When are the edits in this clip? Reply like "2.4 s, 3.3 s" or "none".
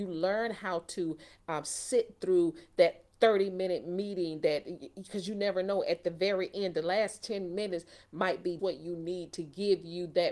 8.6 s